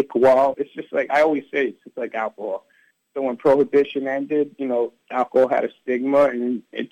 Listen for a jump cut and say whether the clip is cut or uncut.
uncut